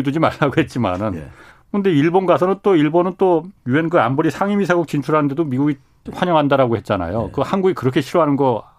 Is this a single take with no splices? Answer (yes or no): no